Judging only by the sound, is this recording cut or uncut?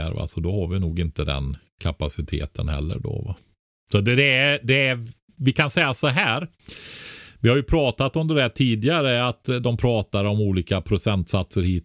uncut